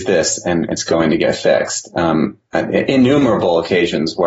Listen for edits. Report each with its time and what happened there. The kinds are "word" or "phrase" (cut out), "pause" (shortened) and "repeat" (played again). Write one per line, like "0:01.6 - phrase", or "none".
none